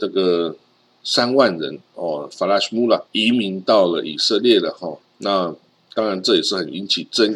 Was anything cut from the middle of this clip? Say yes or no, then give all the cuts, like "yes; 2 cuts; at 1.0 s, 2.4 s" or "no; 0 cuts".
yes; 2 cuts; at 3.1 s, 5.0 s